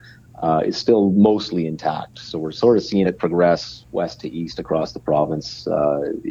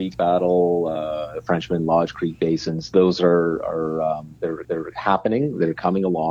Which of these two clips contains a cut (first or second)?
second